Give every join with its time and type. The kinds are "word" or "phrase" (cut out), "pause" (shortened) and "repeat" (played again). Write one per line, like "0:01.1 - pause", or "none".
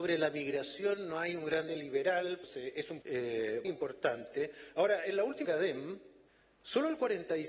0:01.7 - word
0:02.4 - word
0:03.0 - word
0:03.6 - word
0:05.4 - word
0:06.3 - pause